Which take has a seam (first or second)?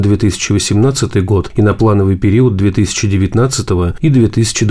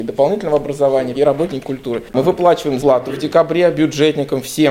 second